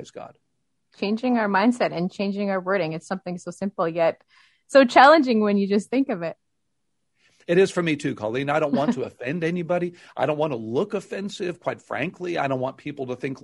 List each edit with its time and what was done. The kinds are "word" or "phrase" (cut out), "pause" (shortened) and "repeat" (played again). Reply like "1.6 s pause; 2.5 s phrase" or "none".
none